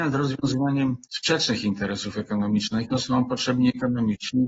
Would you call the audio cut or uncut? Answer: cut